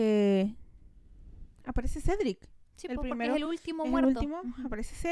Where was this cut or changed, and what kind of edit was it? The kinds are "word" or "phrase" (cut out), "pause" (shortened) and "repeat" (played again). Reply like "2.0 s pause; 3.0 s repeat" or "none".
none